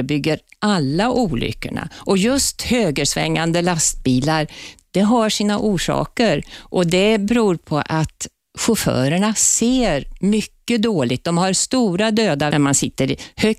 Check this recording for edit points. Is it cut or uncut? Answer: cut